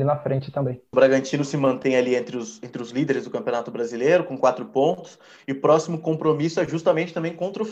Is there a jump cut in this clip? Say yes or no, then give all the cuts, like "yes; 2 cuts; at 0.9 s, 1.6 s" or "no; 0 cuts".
no; 0 cuts